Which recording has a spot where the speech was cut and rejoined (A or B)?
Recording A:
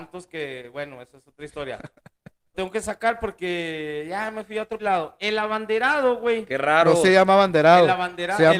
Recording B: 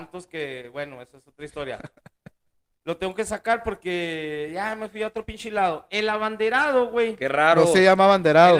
A